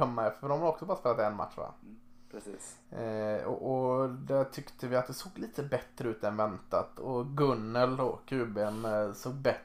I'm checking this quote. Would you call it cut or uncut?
uncut